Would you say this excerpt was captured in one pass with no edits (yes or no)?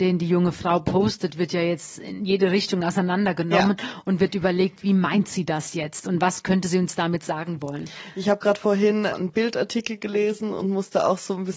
no